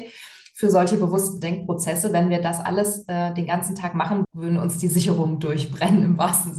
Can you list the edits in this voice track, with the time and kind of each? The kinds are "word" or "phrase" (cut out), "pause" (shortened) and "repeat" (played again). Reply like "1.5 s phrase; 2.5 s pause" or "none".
4.2 s word